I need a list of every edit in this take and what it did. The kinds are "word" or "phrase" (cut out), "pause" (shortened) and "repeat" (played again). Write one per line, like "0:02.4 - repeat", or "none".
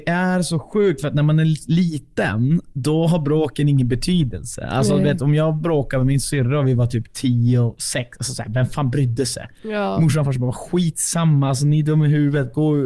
none